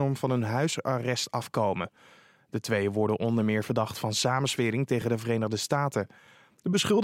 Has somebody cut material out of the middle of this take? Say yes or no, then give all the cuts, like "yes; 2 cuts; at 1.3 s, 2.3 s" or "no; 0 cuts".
no; 0 cuts